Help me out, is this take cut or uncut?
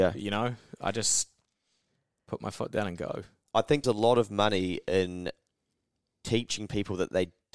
cut